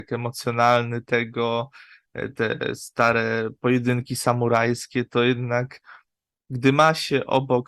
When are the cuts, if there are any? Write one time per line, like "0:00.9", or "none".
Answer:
none